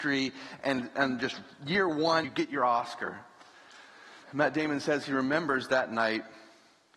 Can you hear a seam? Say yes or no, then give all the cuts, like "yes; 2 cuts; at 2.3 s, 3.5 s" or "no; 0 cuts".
yes; 2 cuts; at 2.2 s, 4.2 s